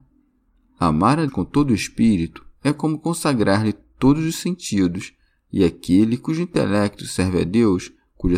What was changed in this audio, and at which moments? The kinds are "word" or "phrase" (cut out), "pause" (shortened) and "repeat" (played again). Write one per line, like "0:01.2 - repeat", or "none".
0:01.3 - word